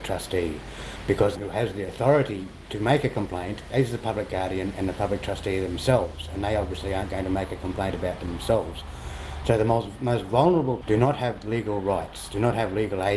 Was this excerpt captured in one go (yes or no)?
no